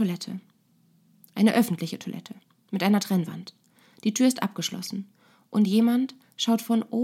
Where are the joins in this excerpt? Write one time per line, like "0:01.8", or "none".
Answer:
none